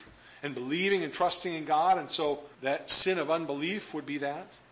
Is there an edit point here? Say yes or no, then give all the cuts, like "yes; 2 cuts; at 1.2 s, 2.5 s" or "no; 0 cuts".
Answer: yes; 1 cut; at 2.5 s